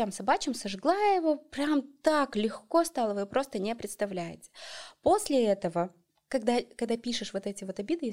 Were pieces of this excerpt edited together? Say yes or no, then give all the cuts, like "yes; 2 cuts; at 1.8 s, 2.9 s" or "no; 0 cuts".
no; 0 cuts